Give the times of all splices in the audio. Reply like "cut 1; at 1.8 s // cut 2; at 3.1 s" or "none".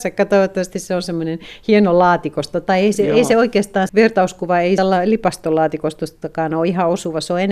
cut 1; at 3.9 s // cut 2; at 4.8 s